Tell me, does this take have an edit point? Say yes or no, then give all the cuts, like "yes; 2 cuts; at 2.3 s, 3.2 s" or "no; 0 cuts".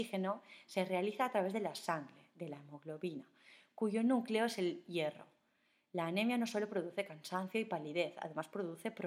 no; 0 cuts